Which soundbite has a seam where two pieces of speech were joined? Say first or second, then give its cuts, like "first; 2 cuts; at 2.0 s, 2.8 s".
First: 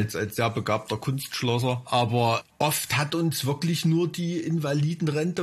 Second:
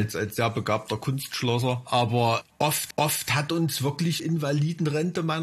second; 2 cuts; at 2.9 s, 4.2 s